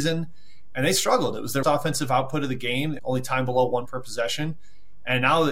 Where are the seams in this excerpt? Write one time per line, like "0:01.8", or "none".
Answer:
0:01.6
0:03.0
0:03.9